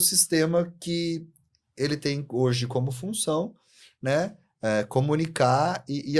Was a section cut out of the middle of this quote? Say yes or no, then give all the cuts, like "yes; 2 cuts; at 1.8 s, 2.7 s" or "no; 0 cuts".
no; 0 cuts